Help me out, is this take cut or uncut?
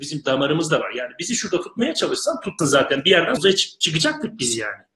cut